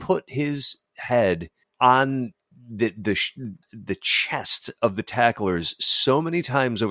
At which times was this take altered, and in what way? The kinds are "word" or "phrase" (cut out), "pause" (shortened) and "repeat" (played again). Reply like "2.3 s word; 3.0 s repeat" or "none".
1.6 s pause; 3.6 s pause